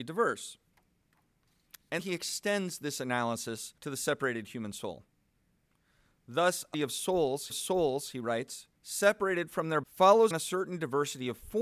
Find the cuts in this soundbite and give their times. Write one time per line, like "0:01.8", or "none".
0:02.0
0:03.8
0:06.7
0:07.5
0:08.7
0:09.8
0:10.3